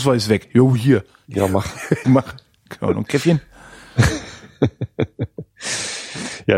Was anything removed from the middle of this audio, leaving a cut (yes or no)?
yes